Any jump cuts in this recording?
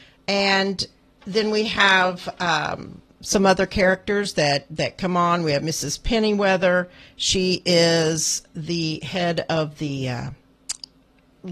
no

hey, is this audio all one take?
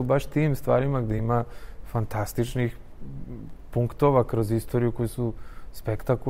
yes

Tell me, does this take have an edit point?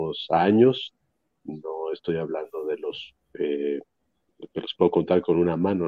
no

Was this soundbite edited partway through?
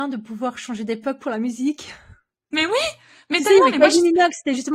no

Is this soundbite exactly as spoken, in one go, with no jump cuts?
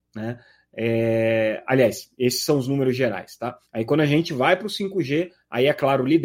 no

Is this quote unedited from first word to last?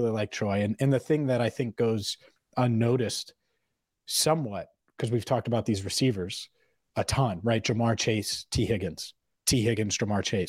yes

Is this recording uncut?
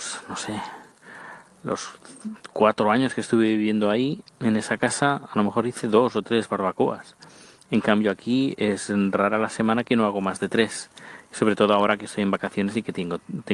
yes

